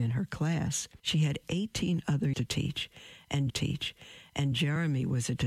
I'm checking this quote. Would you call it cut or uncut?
cut